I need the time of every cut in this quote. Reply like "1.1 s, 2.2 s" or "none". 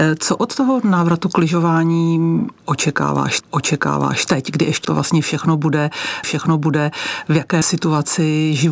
3.4 s, 4.8 s, 6.2 s, 7.6 s